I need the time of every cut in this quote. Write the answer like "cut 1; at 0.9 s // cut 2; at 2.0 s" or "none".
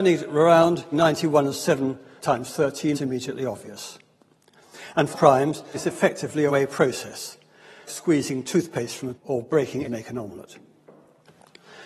cut 1; at 0.9 s // cut 2; at 2.2 s // cut 3; at 2.9 s // cut 4; at 5.1 s // cut 5; at 5.7 s // cut 6; at 6.5 s // cut 7; at 7.9 s // cut 8; at 9.1 s // cut 9; at 9.8 s